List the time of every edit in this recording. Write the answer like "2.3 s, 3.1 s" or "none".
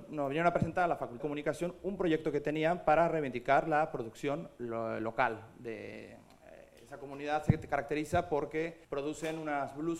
1.2 s, 8.8 s